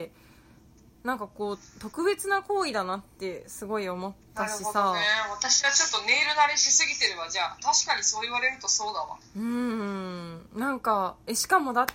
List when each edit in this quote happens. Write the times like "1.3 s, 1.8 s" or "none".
4.2 s